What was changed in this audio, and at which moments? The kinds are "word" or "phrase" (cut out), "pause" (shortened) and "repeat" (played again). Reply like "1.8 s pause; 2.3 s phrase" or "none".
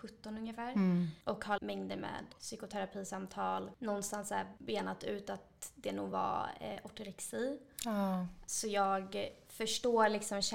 1.2 s pause; 1.6 s phrase